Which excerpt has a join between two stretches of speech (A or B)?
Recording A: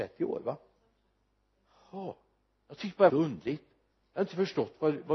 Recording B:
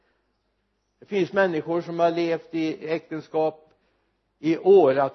A